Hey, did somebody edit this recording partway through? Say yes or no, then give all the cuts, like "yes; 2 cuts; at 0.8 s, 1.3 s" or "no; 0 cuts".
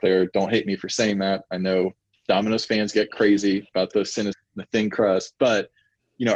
yes; 2 cuts; at 3.7 s, 4.3 s